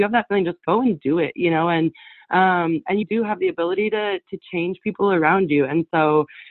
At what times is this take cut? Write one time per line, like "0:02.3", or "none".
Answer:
0:03.0